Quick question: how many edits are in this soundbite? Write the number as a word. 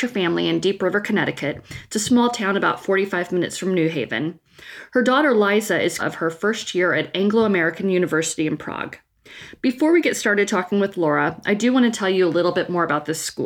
one